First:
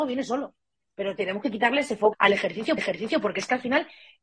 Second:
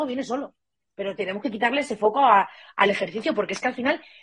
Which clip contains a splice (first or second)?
first